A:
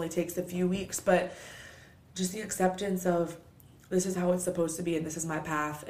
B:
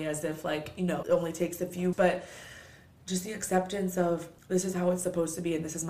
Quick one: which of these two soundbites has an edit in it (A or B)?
B